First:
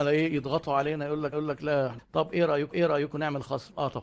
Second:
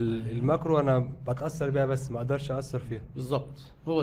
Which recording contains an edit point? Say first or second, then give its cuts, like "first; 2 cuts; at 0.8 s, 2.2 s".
first; 3 cuts; at 1.3 s, 2.0 s, 2.7 s